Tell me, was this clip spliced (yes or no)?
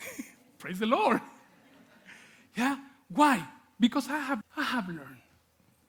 yes